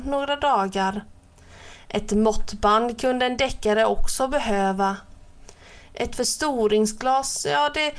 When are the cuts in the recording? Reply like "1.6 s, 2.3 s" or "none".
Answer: none

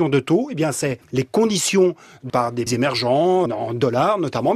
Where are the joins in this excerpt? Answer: 1.0 s, 2.3 s, 2.7 s, 3.5 s

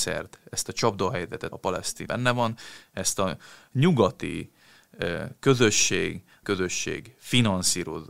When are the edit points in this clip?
1.5 s, 2.1 s, 6.4 s

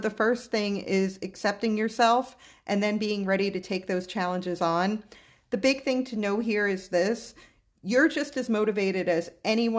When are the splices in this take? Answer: none

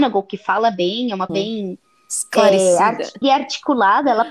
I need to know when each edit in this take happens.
1.3 s, 3.2 s

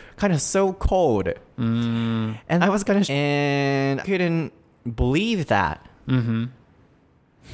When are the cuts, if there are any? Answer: 2.6 s, 3.0 s, 4.0 s

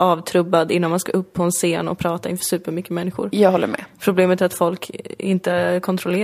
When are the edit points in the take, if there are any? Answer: none

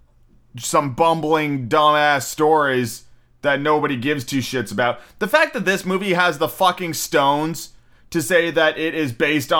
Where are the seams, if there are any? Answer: none

